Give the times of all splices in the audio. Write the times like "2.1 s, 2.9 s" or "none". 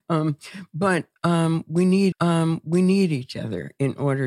2.1 s